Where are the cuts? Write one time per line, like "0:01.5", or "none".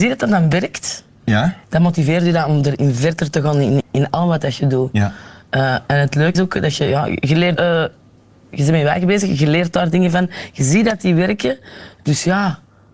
0:01.6
0:03.8
0:06.3
0:07.6